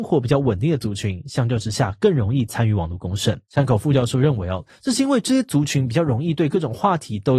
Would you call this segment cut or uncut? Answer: cut